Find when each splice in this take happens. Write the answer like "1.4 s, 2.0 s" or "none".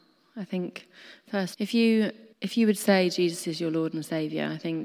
1.5 s, 2.3 s

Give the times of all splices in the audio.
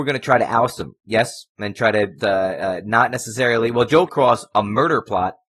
1.0 s, 2.2 s, 4.1 s

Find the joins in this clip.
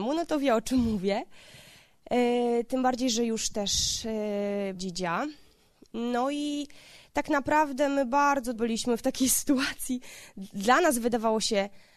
4.8 s, 8.5 s

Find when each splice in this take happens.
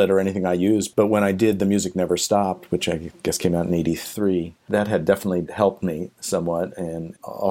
none

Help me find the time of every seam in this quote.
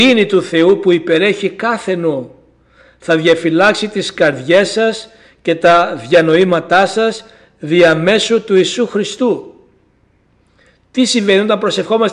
none

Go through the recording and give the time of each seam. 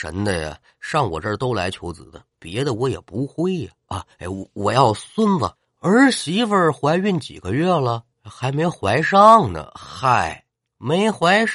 5.6 s, 8.1 s, 10.5 s

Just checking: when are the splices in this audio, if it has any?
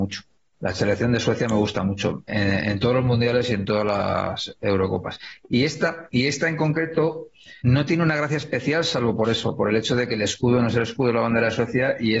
2.3 s, 7.6 s

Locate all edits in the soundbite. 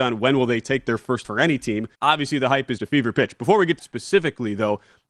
1.2 s, 1.9 s, 2.8 s, 3.8 s

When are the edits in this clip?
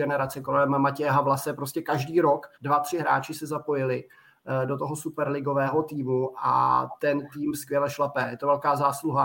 2.5 s

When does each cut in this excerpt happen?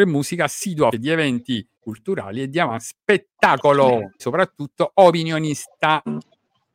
0.9 s, 1.7 s, 4.2 s

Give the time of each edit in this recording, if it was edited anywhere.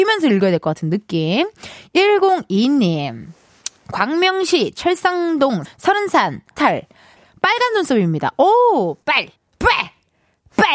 5.7 s, 6.6 s, 9.0 s, 9.4 s

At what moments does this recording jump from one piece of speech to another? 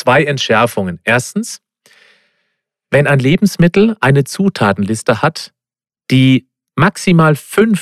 none

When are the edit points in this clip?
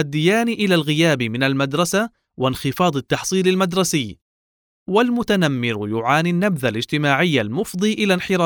none

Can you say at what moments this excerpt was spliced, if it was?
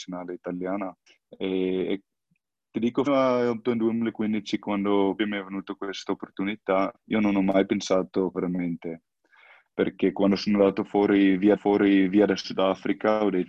1.1 s, 3.1 s, 3.6 s, 5.2 s, 6.9 s, 8.3 s, 11.6 s

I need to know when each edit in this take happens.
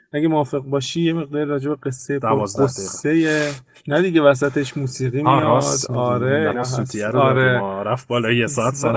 6.5 s

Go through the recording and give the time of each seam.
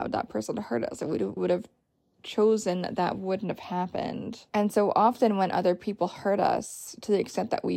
1.4 s, 4.5 s

